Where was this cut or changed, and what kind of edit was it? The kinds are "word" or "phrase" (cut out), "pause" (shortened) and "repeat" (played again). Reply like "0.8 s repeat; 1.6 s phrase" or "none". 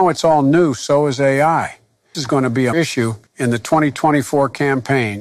2.1 s word; 2.7 s word; 3.3 s pause